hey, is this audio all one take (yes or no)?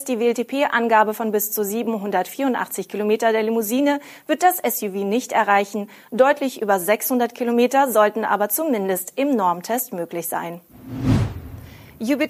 yes